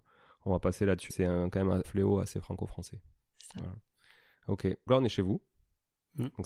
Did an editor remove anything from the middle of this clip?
yes; 3 cuts; at 1.1 s, 1.8 s, 4.9 s

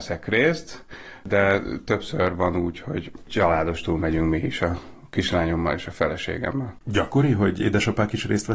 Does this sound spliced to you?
no; 0 cuts

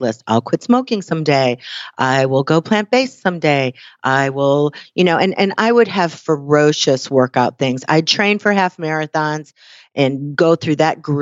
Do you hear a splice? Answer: no; 0 cuts

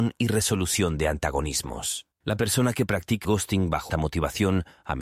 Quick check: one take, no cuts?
no; 3 cuts; at 2.1 s, 3.2 s, 3.9 s

